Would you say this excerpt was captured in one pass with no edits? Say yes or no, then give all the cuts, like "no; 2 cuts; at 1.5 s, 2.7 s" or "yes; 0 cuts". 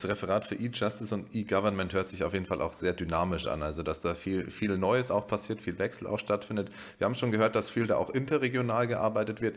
yes; 0 cuts